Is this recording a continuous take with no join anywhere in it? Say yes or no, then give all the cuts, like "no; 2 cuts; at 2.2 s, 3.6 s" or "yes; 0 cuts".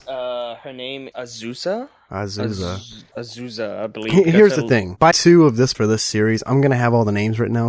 no; 3 cuts; at 1.1 s, 5.1 s, 5.7 s